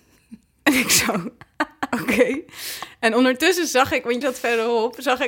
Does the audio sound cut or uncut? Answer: cut